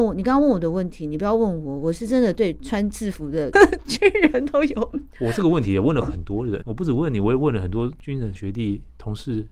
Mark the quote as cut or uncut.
cut